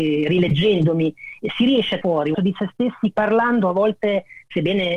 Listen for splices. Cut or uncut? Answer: cut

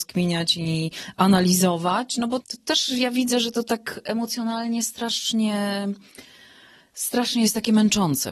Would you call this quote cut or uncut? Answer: cut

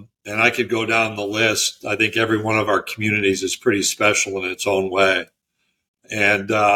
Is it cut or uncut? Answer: uncut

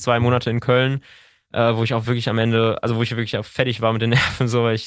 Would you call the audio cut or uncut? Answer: uncut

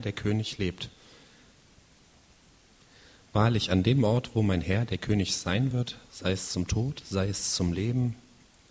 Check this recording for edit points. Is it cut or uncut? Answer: uncut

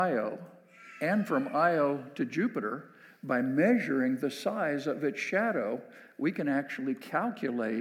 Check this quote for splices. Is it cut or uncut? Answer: uncut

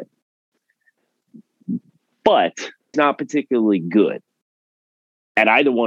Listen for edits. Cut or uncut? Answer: cut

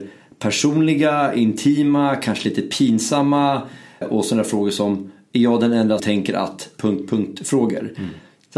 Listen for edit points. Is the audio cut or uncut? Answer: cut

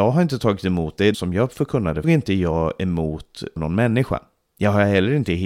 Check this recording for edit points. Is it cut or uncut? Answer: cut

